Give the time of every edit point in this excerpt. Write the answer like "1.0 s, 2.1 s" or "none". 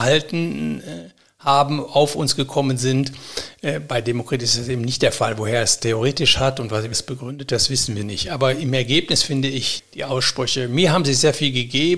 6.9 s, 8.0 s, 9.8 s